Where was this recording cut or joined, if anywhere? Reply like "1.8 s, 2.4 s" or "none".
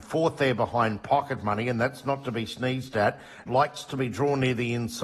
3.5 s